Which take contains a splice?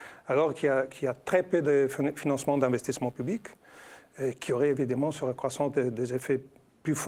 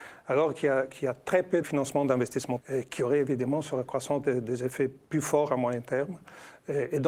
second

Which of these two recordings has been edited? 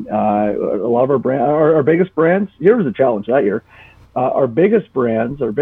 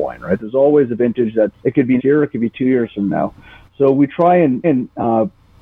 second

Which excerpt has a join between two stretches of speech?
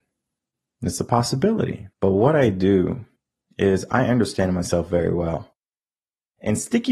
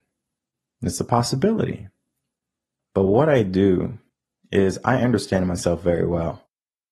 first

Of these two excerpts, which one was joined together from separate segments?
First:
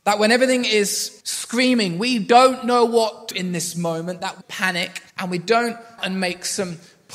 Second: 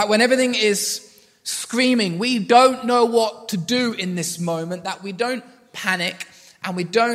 first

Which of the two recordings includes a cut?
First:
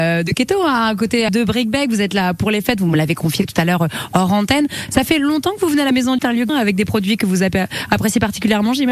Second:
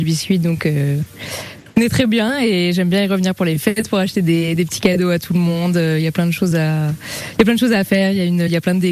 first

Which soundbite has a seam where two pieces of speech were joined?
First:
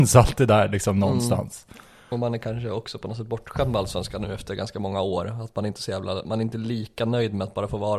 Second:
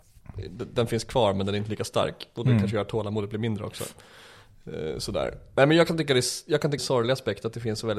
second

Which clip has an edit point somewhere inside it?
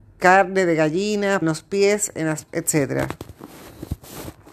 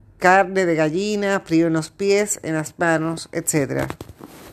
first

